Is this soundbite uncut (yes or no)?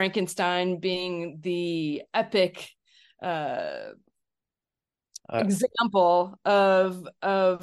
yes